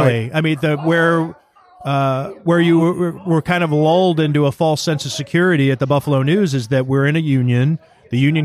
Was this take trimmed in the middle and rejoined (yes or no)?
no